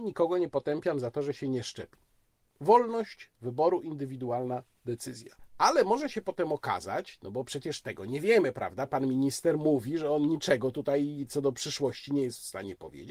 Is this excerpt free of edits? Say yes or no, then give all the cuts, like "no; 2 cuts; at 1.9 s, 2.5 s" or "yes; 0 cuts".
yes; 0 cuts